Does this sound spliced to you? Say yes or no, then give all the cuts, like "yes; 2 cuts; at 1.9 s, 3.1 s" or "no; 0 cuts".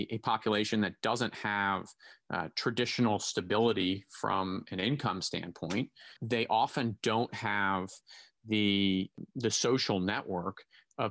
no; 0 cuts